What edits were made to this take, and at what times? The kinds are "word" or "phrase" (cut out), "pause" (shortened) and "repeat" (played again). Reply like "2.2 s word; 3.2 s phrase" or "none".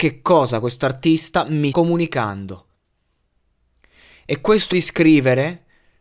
1.7 s word; 4.7 s word